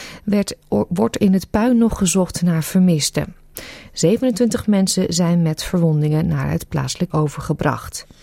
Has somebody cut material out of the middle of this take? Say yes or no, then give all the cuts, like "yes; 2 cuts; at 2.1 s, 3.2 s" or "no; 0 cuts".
yes; 1 cut; at 7.1 s